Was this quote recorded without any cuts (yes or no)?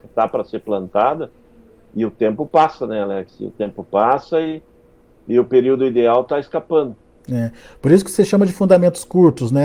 yes